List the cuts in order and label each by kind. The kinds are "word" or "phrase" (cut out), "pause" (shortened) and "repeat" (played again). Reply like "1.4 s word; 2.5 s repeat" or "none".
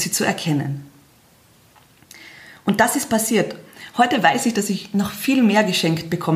none